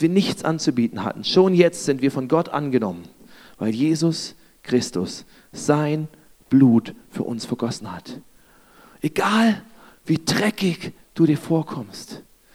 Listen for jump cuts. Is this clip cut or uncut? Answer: uncut